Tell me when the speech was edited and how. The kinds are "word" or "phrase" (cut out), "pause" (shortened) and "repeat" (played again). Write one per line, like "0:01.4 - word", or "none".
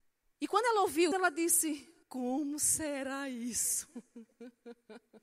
0:01.1 - word
0:02.0 - pause